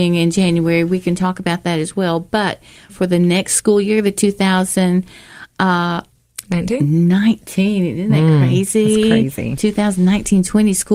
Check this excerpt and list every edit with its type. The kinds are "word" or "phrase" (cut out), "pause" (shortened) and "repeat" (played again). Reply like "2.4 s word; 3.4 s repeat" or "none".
2.9 s phrase